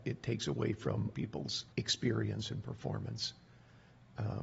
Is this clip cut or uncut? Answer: cut